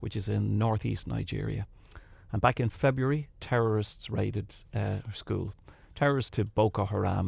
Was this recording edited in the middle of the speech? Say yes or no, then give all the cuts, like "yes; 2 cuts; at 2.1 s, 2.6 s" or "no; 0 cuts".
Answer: yes; 2 cuts; at 3.3 s, 6.3 s